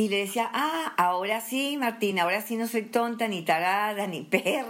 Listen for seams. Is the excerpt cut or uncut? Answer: uncut